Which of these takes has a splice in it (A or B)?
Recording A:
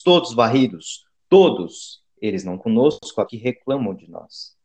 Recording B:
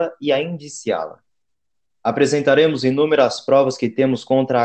A